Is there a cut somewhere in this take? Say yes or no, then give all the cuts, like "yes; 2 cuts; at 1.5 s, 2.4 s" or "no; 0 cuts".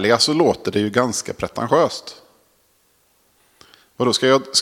no; 0 cuts